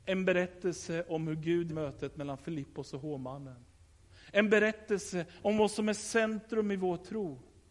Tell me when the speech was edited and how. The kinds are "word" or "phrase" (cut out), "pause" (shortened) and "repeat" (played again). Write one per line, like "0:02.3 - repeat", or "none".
0:01.7 - word